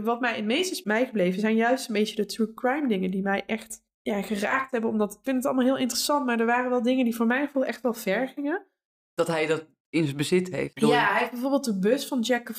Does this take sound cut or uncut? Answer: uncut